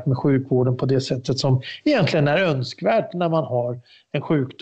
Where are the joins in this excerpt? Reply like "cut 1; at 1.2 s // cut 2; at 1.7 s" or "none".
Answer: none